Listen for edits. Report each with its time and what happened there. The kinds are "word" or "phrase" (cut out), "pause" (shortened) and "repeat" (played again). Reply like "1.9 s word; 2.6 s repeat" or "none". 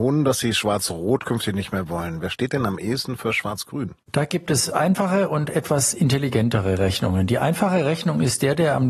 4.0 s pause